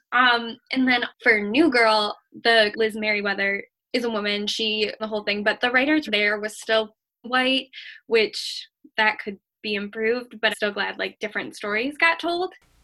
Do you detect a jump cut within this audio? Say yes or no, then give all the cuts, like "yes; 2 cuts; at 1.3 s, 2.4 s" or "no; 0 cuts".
yes; 8 cuts; at 1.1 s, 2.7 s, 3.9 s, 5.0 s, 6.1 s, 7.2 s, 9.5 s, 10.5 s